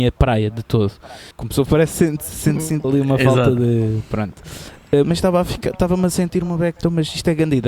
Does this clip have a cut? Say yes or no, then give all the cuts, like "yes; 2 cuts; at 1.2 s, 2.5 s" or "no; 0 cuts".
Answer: yes; 5 cuts; at 1.3 s, 1.7 s, 2.8 s, 5.0 s, 6.8 s